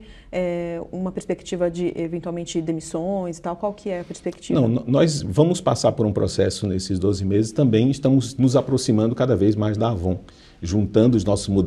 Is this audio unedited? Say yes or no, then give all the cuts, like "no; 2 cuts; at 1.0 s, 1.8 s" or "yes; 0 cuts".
yes; 0 cuts